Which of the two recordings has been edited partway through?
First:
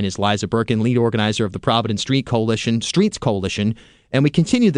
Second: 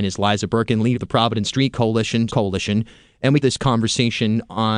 second; 3 cuts; at 0.9 s, 2.3 s, 3.4 s

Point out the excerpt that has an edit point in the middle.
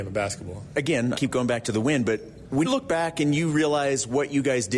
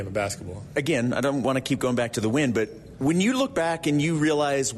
first; 2 cuts; at 1.1 s, 2.6 s

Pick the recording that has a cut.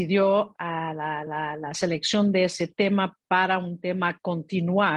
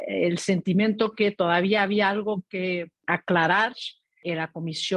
first; 2 cuts; at 1.3 s, 3.2 s

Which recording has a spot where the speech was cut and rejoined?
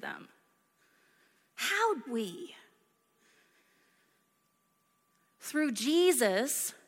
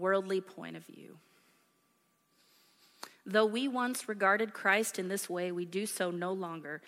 first; 1 cut; at 2.1 s

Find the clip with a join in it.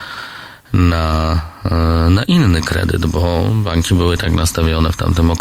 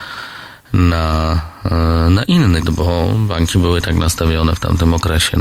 second; 1 cut; at 2.6 s

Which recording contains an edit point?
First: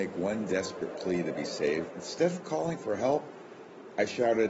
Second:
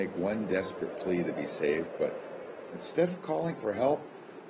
first; 1 cut; at 1.9 s

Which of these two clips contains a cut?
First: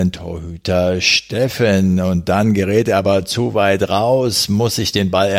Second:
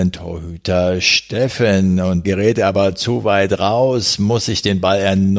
second; 1 cut; at 2.2 s

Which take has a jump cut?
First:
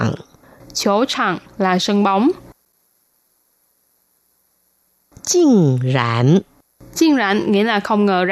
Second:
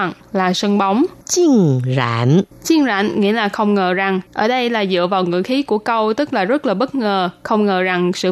second; 3 cuts; at 1.2 s, 2.5 s, 4.3 s

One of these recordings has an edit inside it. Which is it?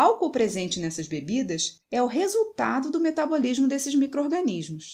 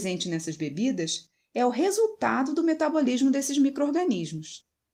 first; 1 cut; at 1.8 s

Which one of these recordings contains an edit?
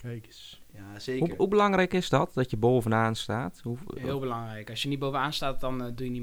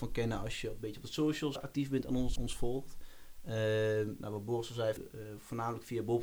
second; 3 cuts; at 1.6 s, 2.4 s, 5.0 s

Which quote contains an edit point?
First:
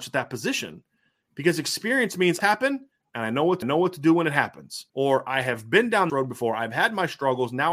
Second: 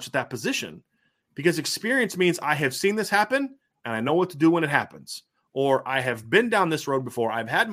first; 4 cuts; at 2.4 s, 3.6 s, 4.9 s, 6.1 s

